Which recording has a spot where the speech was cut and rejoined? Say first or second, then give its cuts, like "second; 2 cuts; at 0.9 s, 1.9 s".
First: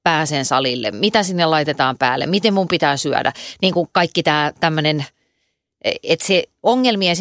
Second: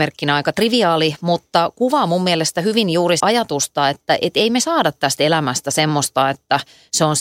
second; 1 cut; at 3.2 s